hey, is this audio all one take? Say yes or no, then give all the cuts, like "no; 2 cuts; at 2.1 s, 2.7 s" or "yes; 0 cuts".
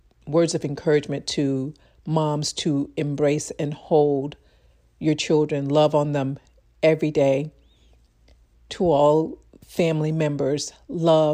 yes; 0 cuts